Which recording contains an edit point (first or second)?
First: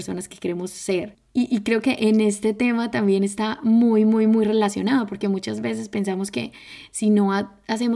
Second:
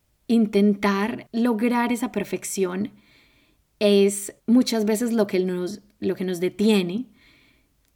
second